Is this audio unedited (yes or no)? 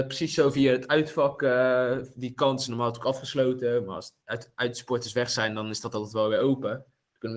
no